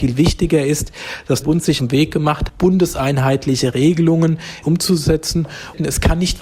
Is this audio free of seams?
no; 4 cuts; at 1.4 s, 1.8 s, 2.5 s, 4.6 s

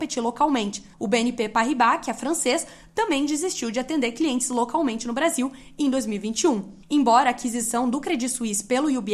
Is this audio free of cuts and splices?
no; 1 cut; at 0.9 s

